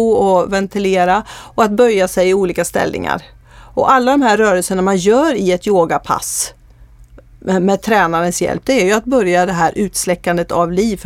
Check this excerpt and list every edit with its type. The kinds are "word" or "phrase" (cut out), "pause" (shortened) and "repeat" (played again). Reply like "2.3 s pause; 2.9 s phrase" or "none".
none